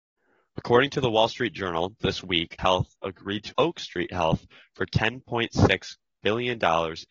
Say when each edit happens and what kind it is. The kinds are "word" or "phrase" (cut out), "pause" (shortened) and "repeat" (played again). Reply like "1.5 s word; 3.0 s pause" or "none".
2.0 s word; 2.6 s word; 3.5 s word